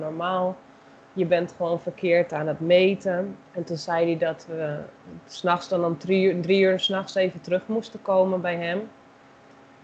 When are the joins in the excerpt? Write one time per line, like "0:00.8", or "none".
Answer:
0:03.4